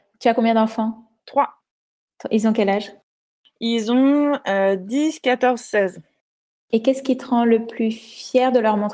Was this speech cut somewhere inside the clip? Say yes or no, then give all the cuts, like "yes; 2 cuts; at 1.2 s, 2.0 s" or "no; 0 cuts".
no; 0 cuts